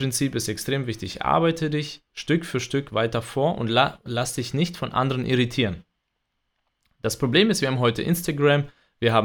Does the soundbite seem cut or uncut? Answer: uncut